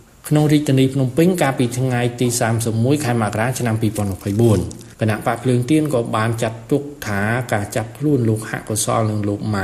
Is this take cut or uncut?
cut